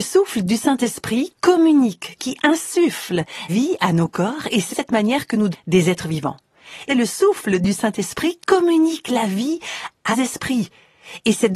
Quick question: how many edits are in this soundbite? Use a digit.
7